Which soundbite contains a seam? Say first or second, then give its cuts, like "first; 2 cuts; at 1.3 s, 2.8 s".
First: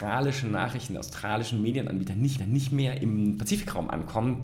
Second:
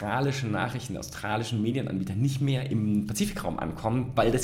first; 1 cut; at 2.4 s